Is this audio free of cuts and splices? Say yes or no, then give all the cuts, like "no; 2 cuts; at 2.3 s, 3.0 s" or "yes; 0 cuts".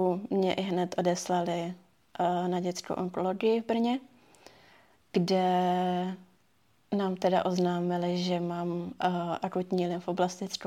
yes; 0 cuts